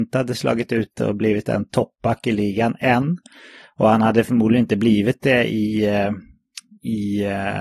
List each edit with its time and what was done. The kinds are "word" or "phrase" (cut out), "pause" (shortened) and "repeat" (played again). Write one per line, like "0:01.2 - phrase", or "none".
none